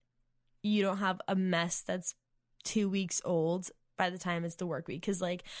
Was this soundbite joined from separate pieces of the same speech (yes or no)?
no